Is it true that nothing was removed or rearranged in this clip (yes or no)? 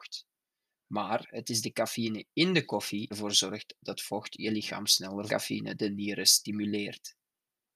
no